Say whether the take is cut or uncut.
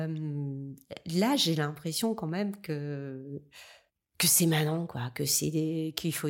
cut